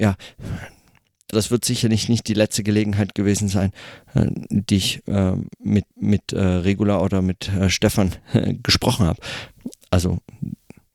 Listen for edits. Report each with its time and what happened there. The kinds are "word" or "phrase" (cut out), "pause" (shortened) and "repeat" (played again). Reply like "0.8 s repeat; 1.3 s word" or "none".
1.3 s word; 5.9 s repeat